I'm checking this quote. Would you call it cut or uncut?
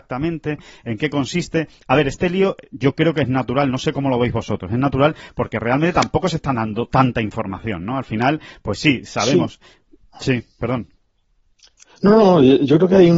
uncut